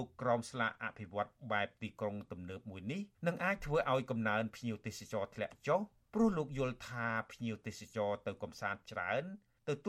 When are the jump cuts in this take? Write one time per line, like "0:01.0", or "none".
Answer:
0:03.1
0:08.8